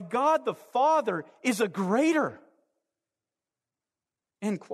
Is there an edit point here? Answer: no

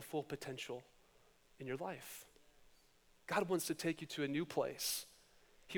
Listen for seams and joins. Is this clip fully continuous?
yes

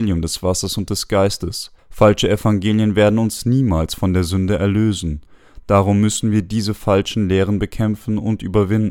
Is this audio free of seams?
no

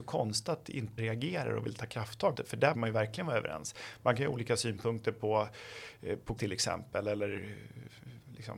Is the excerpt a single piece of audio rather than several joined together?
no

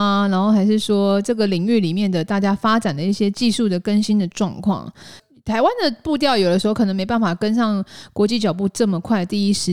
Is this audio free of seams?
yes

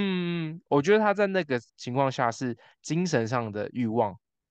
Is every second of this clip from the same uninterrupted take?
no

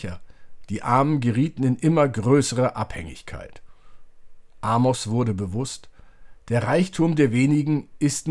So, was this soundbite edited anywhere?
no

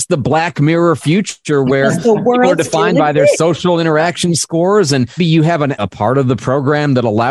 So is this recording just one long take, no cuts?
no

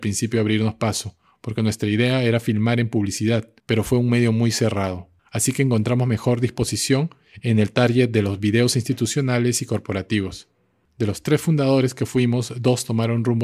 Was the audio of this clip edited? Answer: yes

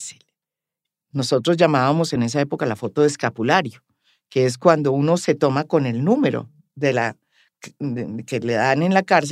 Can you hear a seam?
no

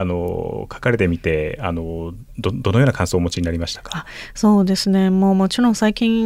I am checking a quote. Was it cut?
no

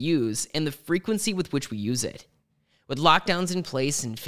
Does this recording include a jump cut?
no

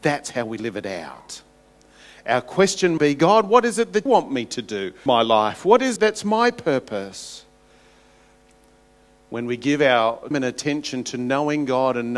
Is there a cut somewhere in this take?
yes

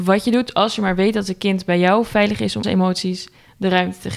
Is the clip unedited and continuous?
no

